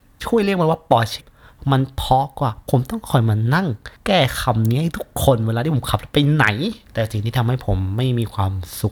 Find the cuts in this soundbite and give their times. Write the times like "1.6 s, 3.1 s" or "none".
1.2 s, 6.8 s